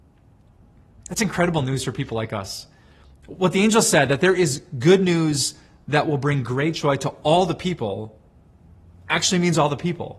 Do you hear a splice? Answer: no; 0 cuts

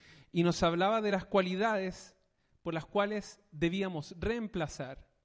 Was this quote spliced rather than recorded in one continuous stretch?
no; 0 cuts

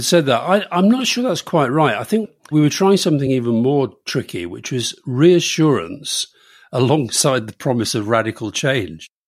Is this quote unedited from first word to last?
yes; 0 cuts

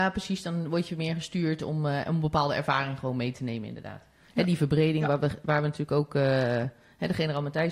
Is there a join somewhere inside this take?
no; 0 cuts

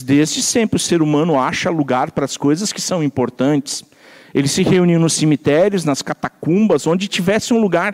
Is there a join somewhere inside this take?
no; 0 cuts

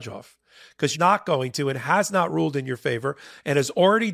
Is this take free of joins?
no; 1 cut; at 0.9 s

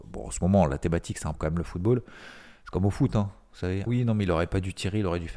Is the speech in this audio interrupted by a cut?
yes; 2 cuts; at 1.3 s, 3.9 s

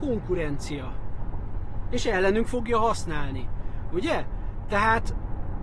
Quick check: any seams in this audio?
no; 0 cuts

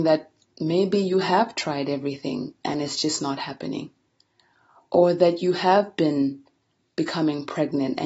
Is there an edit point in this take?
no; 0 cuts

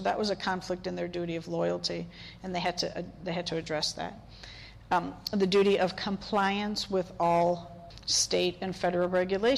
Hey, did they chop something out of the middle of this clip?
no; 0 cuts

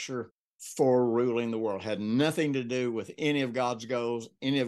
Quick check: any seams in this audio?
no; 0 cuts

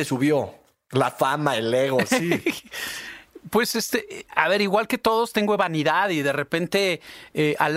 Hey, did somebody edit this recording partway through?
no; 0 cuts

